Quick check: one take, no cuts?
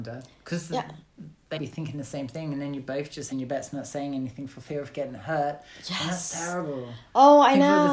no; 2 cuts; at 1.6 s, 3.3 s

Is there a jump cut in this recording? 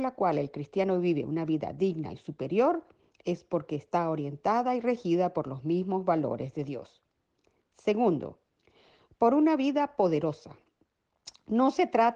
no; 0 cuts

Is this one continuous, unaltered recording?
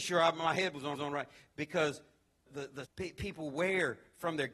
no; 3 cuts; at 0.9 s, 2.5 s, 2.8 s

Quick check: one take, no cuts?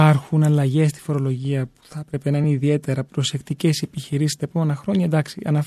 yes; 0 cuts

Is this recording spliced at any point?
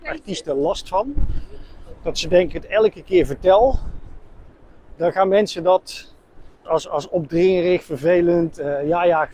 yes; 2 cuts; at 2.5 s, 6.7 s

